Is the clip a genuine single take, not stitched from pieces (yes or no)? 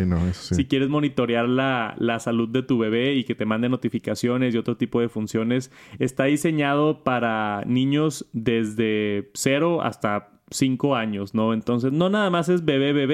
yes